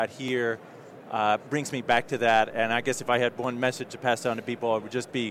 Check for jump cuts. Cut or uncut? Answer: uncut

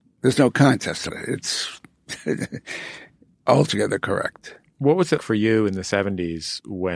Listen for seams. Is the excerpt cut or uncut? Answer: cut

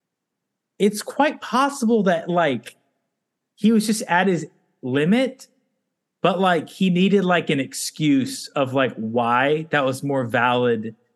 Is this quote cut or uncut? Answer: uncut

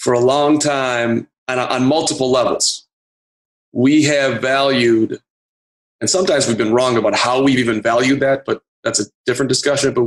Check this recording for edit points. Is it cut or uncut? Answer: uncut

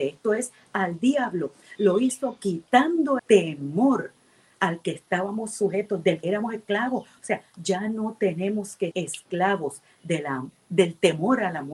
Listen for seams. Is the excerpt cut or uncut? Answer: cut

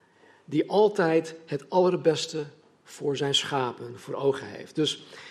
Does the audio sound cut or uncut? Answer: uncut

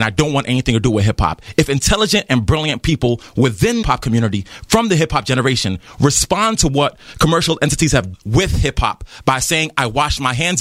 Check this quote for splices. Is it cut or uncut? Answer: cut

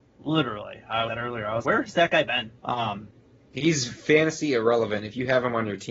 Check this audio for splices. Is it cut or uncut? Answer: cut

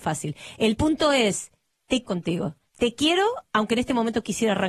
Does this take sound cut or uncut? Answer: cut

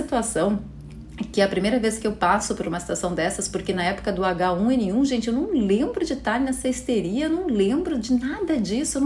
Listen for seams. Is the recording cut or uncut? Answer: uncut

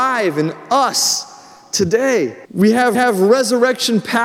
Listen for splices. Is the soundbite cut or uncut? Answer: cut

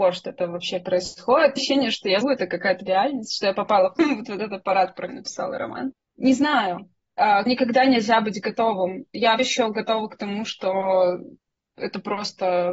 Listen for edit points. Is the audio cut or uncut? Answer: cut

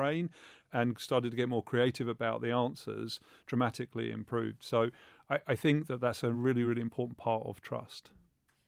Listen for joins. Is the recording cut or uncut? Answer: uncut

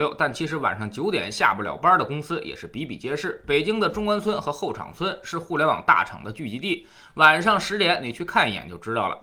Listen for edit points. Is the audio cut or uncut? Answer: uncut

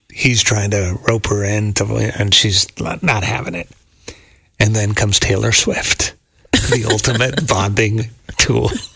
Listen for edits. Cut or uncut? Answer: uncut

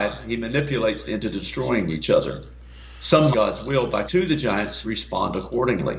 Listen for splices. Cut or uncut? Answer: cut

